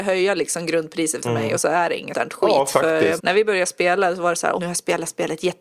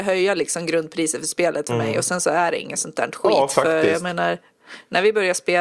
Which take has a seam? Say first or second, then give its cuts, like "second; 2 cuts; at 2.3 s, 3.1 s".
first; 5 cuts; at 1.2 s, 1.6 s, 2.1 s, 3.2 s, 4.6 s